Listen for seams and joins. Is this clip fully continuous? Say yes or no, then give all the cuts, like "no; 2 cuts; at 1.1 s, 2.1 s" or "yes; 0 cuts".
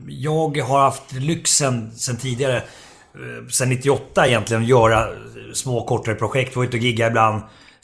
yes; 0 cuts